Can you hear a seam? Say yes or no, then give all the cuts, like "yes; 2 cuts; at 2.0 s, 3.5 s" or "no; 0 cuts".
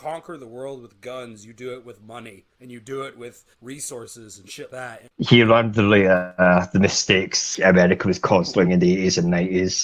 yes; 4 cuts; at 2.5 s, 3.5 s, 4.7 s, 8.6 s